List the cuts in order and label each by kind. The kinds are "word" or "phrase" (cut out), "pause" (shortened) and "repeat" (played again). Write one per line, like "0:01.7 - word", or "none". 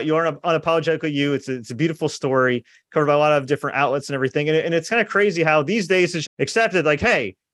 0:06.2 - word